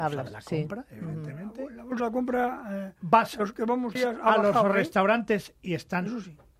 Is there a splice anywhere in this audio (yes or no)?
yes